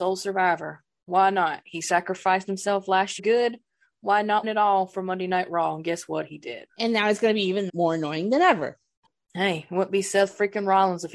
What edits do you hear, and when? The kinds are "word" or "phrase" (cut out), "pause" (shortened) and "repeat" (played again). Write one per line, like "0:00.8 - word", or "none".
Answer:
0:03.2 - phrase
0:04.4 - word
0:06.7 - pause
0:07.7 - word